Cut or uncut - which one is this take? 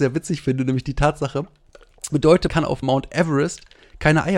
cut